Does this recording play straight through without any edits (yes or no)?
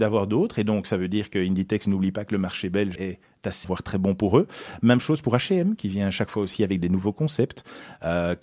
no